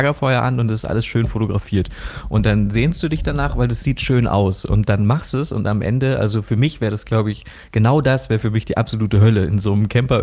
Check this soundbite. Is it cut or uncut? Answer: uncut